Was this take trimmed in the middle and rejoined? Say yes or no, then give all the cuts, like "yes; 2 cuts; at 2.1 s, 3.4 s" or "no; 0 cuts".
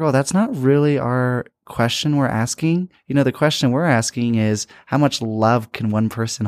yes; 1 cut; at 2.9 s